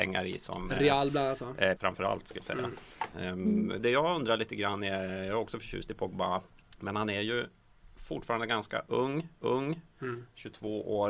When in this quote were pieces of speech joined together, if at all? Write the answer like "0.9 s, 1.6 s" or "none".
1.8 s, 2.4 s, 3.8 s, 6.5 s, 9.4 s